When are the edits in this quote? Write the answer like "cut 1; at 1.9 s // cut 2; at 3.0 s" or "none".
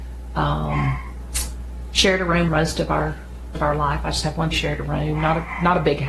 cut 1; at 2.5 s // cut 2; at 3.5 s // cut 3; at 4.5 s